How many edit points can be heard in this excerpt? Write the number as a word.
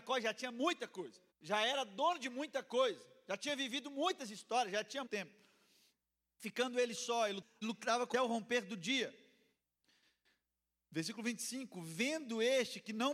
four